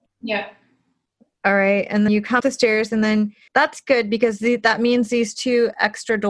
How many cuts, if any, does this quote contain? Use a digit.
3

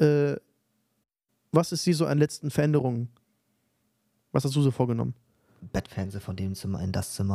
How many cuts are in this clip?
1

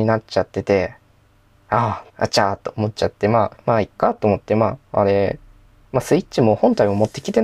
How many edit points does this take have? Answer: 2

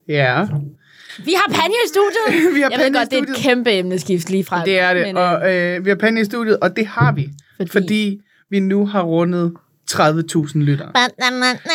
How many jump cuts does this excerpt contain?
0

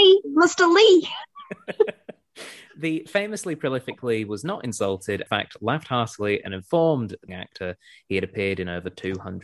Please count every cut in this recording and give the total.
2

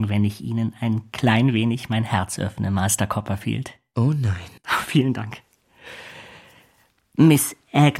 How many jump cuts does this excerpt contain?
1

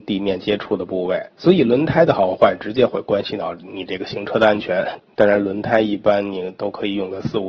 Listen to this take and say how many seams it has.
1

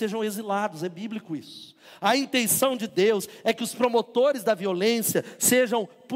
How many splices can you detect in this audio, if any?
0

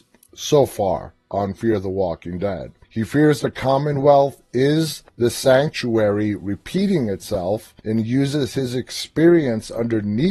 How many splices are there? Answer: 3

